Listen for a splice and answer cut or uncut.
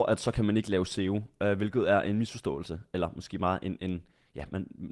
uncut